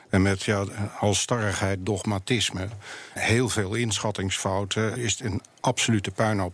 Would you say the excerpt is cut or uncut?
cut